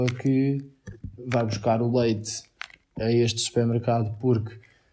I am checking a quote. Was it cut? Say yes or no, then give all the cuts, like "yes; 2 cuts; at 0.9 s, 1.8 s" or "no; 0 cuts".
no; 0 cuts